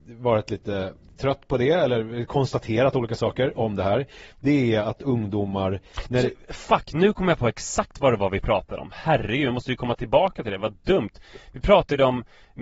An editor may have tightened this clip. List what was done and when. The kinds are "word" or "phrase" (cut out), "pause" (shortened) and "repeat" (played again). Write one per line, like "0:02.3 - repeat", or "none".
none

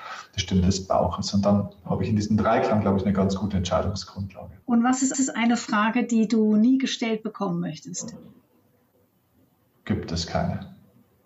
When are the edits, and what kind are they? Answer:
0:04.6 - pause
0:05.1 - repeat

